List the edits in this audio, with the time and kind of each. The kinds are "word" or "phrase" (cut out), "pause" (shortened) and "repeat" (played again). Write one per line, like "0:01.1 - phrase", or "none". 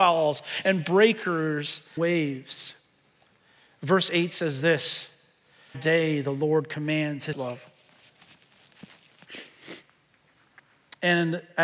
0:02.0 - word
0:05.7 - word
0:07.3 - word